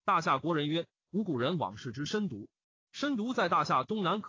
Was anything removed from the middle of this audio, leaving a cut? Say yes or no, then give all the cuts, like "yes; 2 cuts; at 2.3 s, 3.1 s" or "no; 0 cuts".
no; 0 cuts